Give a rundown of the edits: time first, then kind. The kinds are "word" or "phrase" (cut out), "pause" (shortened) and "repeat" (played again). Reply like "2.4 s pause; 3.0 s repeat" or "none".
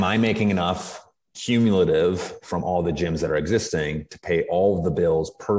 none